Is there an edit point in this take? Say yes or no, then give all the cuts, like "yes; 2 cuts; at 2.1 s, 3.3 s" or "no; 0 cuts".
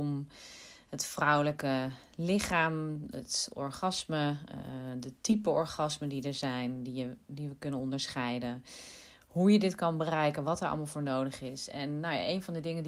no; 0 cuts